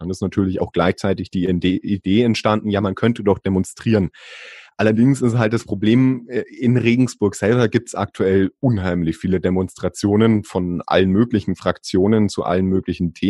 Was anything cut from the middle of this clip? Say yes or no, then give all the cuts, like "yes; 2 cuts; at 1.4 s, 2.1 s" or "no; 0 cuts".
no; 0 cuts